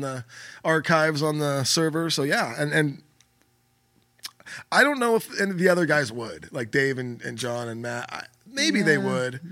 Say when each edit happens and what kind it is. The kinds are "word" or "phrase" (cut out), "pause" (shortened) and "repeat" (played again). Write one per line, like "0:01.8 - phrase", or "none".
none